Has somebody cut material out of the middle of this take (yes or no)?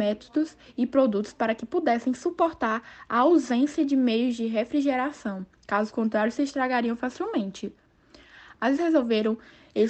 yes